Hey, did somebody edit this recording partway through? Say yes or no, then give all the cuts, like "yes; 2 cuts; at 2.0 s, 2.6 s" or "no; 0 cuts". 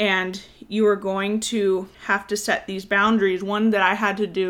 yes; 1 cut; at 1.9 s